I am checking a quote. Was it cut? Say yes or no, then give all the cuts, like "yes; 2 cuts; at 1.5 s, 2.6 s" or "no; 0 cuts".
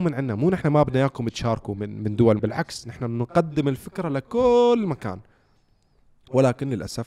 yes; 1 cut; at 2.4 s